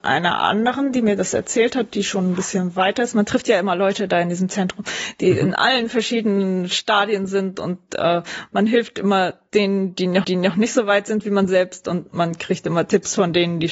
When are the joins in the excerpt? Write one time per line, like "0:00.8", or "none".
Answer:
0:10.2